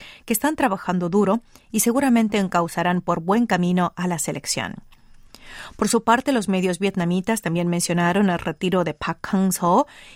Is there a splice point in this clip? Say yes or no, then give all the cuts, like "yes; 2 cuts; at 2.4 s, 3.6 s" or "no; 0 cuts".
no; 0 cuts